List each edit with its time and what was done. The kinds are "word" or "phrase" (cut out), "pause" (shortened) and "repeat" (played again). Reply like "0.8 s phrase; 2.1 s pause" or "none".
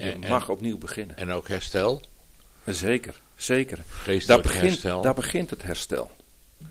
none